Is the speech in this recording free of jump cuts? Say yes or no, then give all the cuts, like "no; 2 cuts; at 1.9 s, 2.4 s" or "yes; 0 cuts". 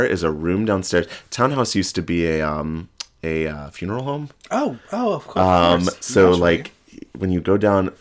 yes; 0 cuts